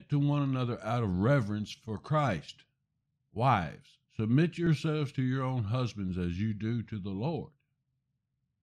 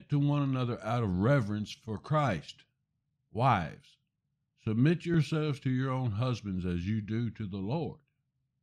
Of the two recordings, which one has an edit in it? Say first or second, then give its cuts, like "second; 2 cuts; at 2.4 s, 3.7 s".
first; 1 cut; at 4.1 s